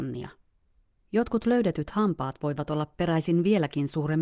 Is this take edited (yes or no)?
no